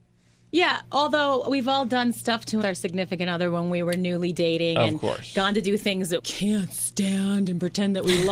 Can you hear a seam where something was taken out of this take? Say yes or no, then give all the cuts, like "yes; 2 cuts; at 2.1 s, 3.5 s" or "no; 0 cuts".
yes; 2 cuts; at 2.6 s, 6.2 s